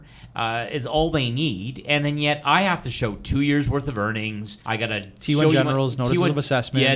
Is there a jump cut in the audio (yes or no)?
yes